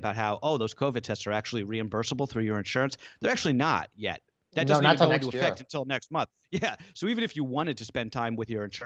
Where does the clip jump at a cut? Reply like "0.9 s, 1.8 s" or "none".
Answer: none